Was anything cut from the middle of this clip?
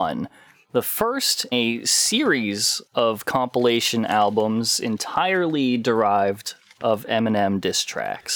yes; 2 cuts; at 1.5 s, 2.9 s

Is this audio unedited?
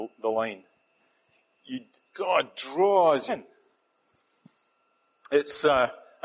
no; 2 cuts; at 2.0 s, 3.3 s

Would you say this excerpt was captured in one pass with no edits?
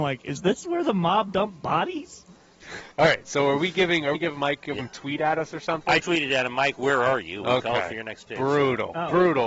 no; 4 cuts; at 2.9 s, 4.1 s, 4.8 s, 6.0 s

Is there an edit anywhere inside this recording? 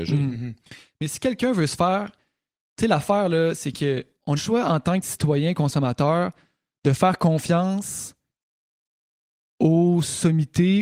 yes; 2 cuts; at 4.4 s, 5.0 s

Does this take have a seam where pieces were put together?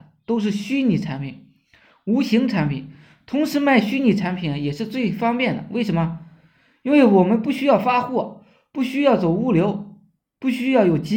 no; 0 cuts

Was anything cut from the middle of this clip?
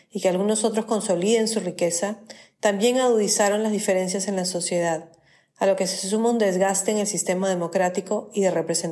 no; 0 cuts

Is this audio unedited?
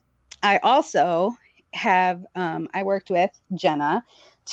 yes; 0 cuts

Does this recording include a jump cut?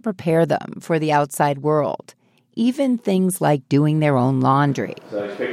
no; 0 cuts

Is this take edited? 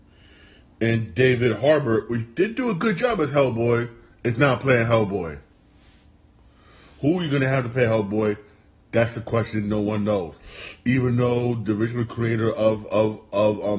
no; 0 cuts

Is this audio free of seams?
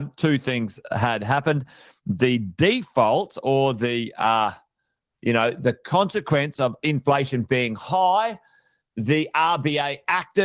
yes; 0 cuts

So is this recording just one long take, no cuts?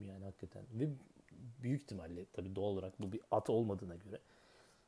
yes; 0 cuts

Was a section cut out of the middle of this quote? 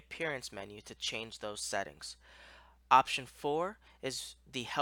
no; 0 cuts

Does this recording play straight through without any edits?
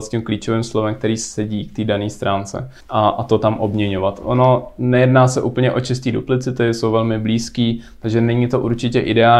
no; 1 cut; at 2.8 s

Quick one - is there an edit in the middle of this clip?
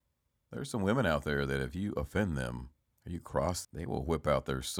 yes; 1 cut; at 3.6 s

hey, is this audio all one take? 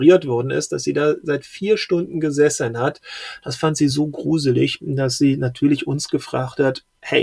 yes; 0 cuts

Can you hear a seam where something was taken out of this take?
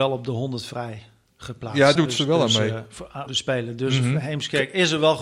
yes; 2 cuts; at 2.0 s, 3.3 s

